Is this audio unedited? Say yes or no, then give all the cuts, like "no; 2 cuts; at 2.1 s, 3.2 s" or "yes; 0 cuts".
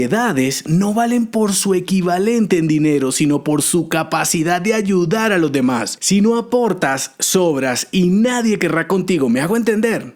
yes; 0 cuts